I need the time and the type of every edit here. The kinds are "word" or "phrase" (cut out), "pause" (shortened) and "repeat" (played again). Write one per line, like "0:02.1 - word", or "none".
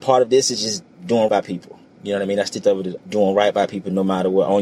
0:01.3 - word
0:02.6 - word
0:03.0 - word